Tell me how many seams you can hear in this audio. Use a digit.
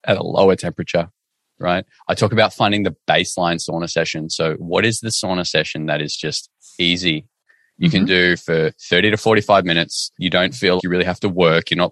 2